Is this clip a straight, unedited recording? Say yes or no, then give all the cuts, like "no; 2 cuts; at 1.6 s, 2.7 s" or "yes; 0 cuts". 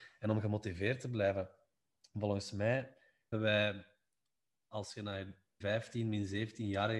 no; 2 cuts; at 3.3 s, 5.6 s